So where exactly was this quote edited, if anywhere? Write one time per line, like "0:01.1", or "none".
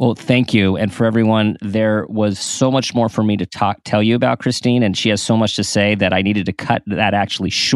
none